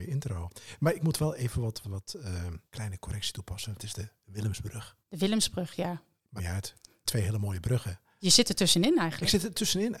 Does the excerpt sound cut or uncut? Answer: cut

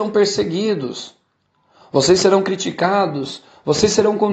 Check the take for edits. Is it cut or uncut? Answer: uncut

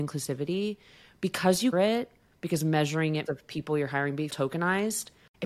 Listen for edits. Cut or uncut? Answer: cut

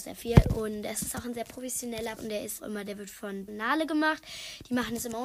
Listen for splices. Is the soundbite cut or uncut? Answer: cut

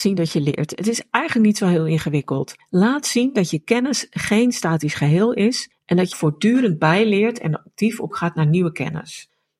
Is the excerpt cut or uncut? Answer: cut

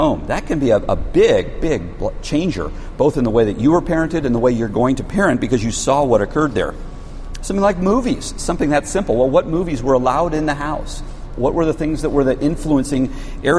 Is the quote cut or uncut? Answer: uncut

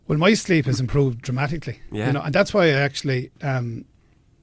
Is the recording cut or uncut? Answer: uncut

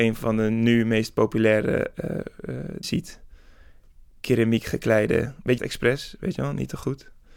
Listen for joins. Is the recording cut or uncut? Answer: cut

